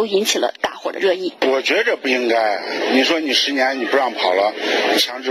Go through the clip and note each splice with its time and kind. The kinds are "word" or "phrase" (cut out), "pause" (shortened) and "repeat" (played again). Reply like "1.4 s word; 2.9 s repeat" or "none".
1.4 s pause